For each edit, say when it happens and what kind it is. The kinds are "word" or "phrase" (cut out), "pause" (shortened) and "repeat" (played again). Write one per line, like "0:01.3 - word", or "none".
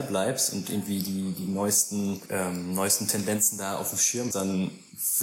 0:04.3 - word